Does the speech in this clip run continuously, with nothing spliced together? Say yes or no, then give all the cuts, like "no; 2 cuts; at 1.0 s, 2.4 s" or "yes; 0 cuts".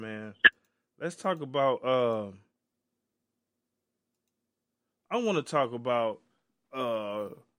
yes; 0 cuts